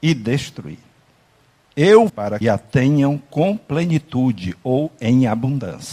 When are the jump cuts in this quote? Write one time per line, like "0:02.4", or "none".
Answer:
0:02.1
0:02.4